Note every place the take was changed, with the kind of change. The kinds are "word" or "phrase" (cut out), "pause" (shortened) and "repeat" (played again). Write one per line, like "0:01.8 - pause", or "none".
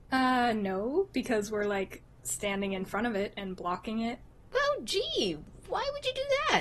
none